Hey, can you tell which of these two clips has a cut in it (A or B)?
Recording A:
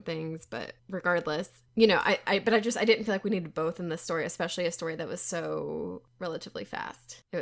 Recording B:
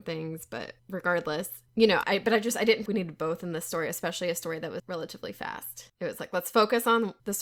B